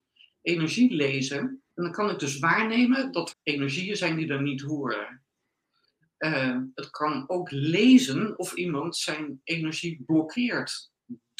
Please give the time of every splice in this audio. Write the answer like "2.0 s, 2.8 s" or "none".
1.7 s, 3.3 s